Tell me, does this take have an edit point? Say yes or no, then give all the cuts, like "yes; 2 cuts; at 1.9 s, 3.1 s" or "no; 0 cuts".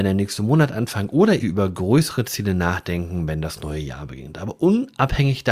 yes; 1 cut; at 1.4 s